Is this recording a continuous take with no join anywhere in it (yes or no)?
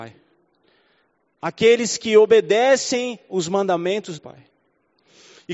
no